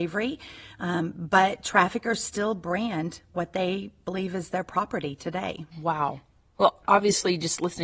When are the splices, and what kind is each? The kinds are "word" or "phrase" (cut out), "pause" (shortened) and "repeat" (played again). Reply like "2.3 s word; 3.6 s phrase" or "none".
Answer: 5.7 s pause